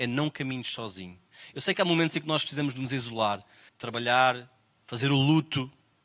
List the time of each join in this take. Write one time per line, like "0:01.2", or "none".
0:03.7